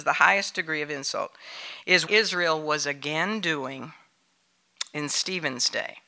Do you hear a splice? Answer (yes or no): yes